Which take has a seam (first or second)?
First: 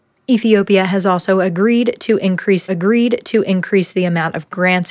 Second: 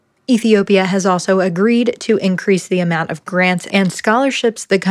first